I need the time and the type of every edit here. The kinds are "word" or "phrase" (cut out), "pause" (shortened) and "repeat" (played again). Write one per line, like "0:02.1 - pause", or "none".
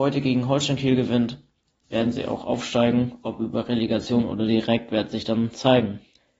0:01.8 - word

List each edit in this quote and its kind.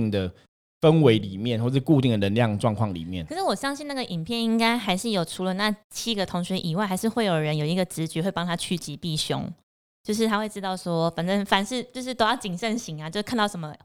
none

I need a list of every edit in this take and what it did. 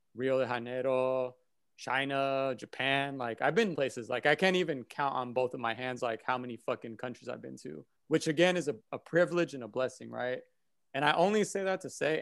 0:03.8 - phrase
0:06.0 - phrase
0:08.0 - pause

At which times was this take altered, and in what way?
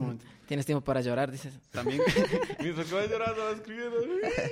none

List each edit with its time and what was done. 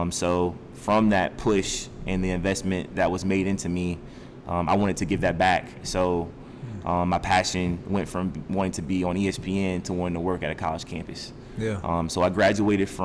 none

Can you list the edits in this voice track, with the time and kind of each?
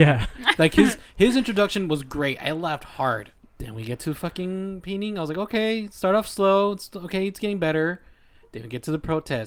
0:03.4 - pause

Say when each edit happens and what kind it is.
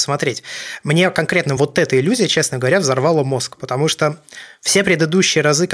none

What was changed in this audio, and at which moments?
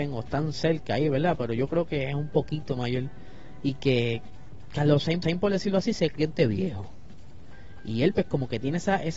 0:05.2 - repeat

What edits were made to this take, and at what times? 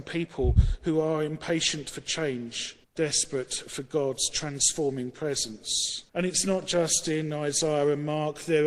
0:02.8 - pause
0:06.1 - pause

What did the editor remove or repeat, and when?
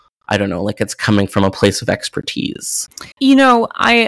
0:03.1 - pause

